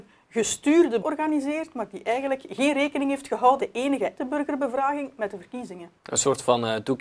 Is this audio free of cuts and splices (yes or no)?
no